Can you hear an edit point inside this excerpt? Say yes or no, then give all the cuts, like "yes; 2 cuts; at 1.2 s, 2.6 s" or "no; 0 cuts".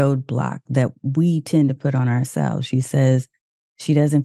no; 0 cuts